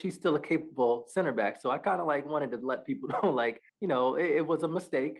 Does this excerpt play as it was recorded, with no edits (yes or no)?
yes